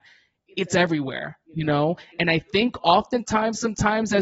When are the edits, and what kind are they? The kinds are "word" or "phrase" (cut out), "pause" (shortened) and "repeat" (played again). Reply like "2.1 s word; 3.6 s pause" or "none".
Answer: none